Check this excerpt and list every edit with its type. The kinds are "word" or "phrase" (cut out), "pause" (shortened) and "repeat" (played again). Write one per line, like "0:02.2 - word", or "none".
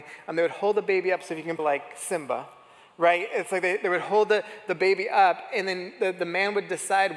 0:01.6 - word